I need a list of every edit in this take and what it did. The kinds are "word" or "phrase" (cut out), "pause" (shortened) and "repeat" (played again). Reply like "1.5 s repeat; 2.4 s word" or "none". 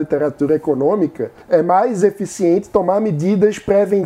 1.4 s pause